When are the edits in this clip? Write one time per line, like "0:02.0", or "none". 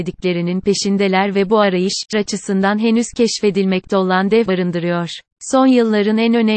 0:02.1
0:04.5
0:05.3